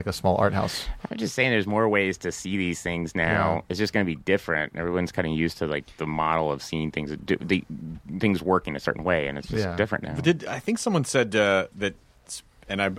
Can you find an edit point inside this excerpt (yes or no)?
no